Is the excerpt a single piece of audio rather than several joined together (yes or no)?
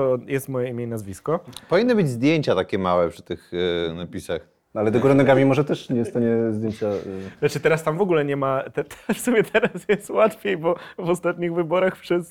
yes